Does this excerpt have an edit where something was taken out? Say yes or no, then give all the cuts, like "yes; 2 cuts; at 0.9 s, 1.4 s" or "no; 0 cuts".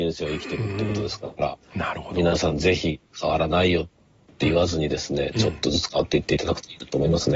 yes; 2 cuts; at 1.6 s, 3.1 s